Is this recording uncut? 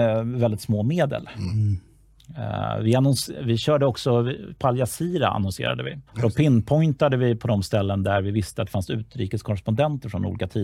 no; 1 cut; at 6.1 s

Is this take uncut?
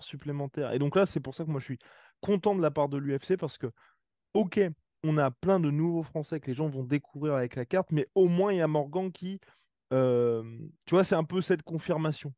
yes; 0 cuts

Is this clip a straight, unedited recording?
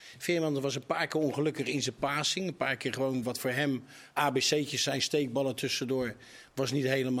yes; 0 cuts

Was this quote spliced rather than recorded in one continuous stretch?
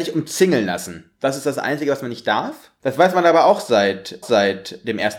yes; 1 cut; at 4.2 s

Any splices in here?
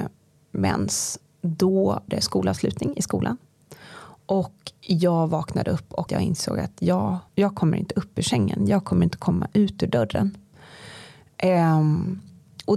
yes; 3 cuts; at 2.1 s, 6.1 s, 7.3 s

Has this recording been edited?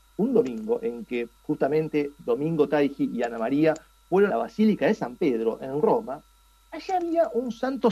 yes; 2 cuts; at 1.4 s, 4.3 s

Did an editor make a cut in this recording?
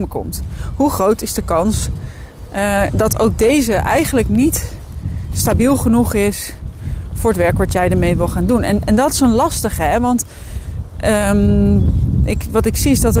no; 0 cuts

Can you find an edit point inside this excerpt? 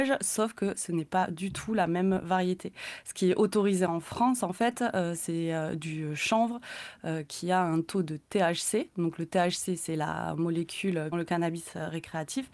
yes; 1 cut; at 11.1 s

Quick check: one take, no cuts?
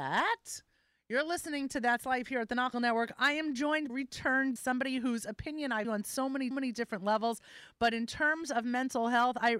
no; 5 cuts; at 2.7 s, 3.9 s, 4.6 s, 5.8 s, 6.5 s

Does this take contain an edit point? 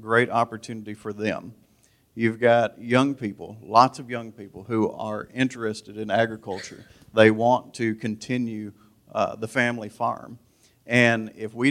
no; 0 cuts

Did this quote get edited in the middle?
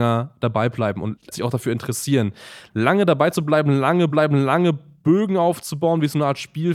yes; 2 cuts; at 1.3 s, 4.1 s

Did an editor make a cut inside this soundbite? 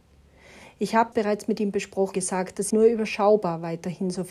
yes; 3 cuts; at 1.1 s, 2.1 s, 2.7 s

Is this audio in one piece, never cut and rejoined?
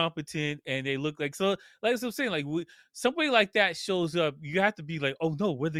yes; 0 cuts

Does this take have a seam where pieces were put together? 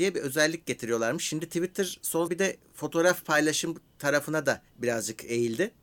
yes; 2 cuts; at 2.3 s, 4.7 s

